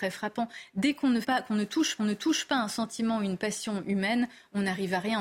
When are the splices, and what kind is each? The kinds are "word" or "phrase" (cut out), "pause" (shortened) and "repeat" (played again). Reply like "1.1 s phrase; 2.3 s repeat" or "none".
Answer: 1.2 s word; 2.0 s repeat